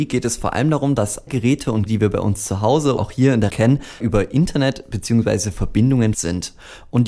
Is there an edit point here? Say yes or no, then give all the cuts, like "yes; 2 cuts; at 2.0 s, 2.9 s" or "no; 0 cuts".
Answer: yes; 6 cuts; at 1.3 s, 1.9 s, 3.0 s, 3.5 s, 4.0 s, 6.1 s